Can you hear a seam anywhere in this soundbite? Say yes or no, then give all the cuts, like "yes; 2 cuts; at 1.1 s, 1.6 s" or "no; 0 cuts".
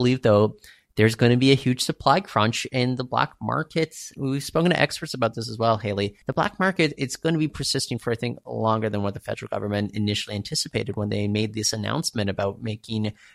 yes; 1 cut; at 6.2 s